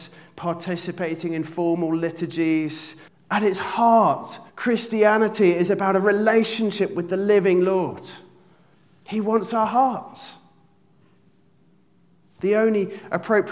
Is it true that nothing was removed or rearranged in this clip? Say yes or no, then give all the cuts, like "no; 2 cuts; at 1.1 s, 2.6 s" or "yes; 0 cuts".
no; 3 cuts; at 3.1 s, 4.5 s, 8.7 s